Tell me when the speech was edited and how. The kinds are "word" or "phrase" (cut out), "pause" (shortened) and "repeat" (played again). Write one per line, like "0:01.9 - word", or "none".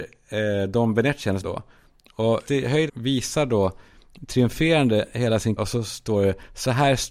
0:01.4 - word
0:02.5 - word
0:02.9 - phrase
0:05.6 - word

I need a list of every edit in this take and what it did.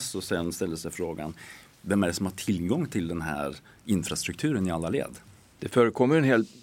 none

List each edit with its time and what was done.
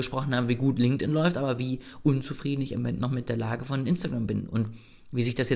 none

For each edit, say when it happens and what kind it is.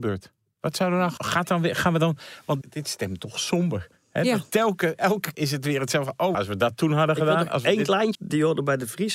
0:01.2 - word
0:02.6 - word
0:05.3 - word
0:06.3 - word
0:08.1 - word

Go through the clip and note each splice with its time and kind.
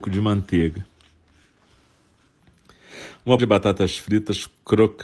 0:03.4 - word

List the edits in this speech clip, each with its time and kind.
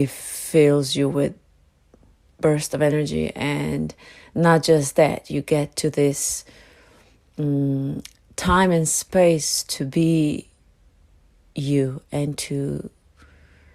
none

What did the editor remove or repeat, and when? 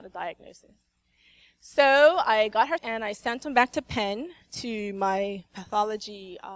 0:02.8 - word

